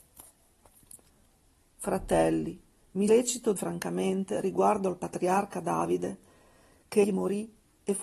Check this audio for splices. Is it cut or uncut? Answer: cut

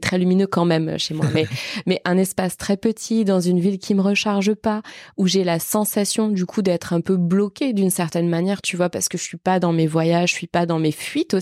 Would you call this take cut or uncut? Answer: uncut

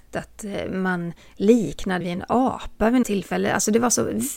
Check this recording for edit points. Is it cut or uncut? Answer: cut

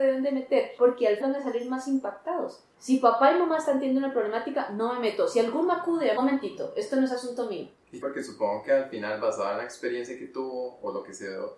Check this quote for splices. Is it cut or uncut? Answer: cut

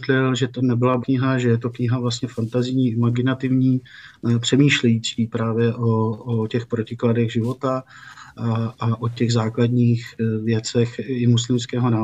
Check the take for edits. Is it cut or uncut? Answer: cut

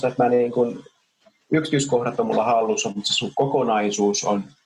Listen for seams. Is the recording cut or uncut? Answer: uncut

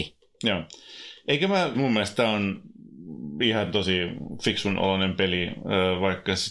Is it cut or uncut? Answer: cut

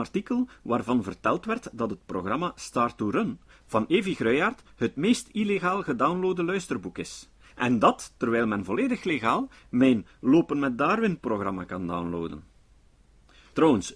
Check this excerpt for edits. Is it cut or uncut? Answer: uncut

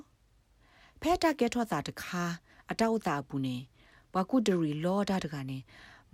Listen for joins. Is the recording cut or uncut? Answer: uncut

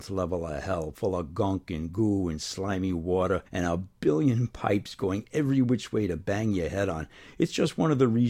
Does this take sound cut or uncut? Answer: cut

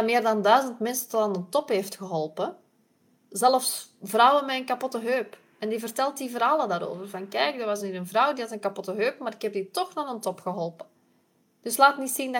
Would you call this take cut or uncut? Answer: uncut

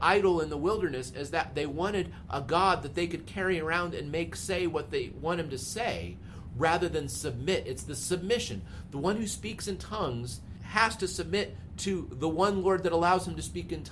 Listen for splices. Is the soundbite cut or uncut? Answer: uncut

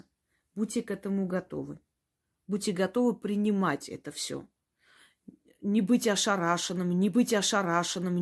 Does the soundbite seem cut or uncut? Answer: cut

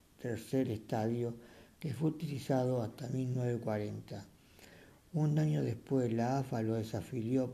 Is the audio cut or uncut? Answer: uncut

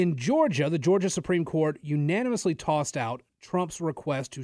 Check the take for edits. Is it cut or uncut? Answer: uncut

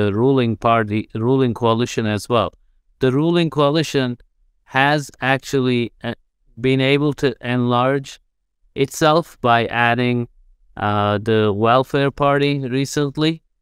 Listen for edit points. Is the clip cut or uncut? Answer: uncut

